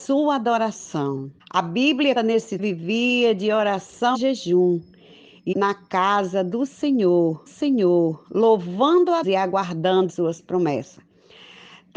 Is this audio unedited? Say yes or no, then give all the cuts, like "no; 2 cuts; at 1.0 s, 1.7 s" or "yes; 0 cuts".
no; 8 cuts; at 1.4 s, 2.2 s, 2.6 s, 4.1 s, 5.5 s, 7.5 s, 9.2 s, 10.1 s